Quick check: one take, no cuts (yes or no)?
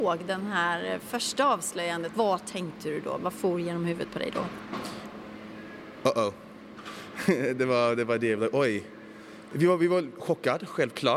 no